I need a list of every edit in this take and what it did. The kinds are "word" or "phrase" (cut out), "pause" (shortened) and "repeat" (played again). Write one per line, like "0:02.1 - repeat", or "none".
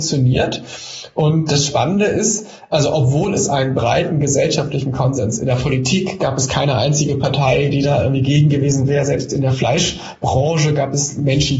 none